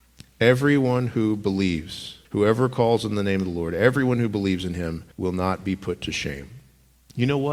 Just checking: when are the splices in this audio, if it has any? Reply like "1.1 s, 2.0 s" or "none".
2.2 s, 5.1 s

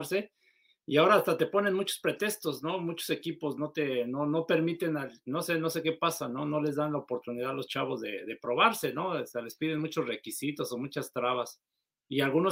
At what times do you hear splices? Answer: none

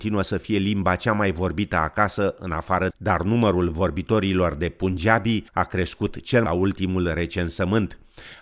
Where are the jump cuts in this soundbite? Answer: 2.9 s, 5.5 s, 6.5 s

